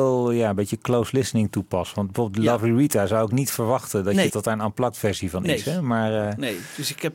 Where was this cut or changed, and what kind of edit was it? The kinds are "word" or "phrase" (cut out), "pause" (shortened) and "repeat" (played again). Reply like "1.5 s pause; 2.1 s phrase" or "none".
4.3 s word